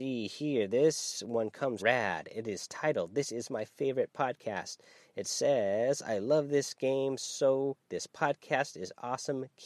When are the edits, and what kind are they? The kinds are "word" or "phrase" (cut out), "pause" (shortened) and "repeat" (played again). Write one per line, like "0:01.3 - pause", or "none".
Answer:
0:01.8 - phrase